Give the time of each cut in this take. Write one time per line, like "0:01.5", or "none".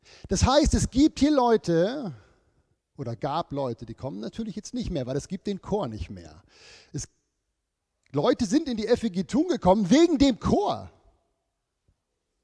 none